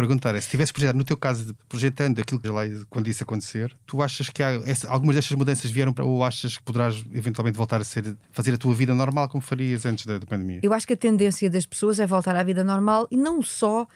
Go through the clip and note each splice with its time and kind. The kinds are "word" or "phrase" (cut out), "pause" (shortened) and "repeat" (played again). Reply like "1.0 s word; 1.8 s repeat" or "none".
1.6 s word; 2.4 s phrase; 3.8 s pause; 6.0 s word; 6.6 s word; 8.2 s pause